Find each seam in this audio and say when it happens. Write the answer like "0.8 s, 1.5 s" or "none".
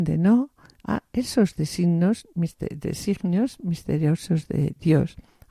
none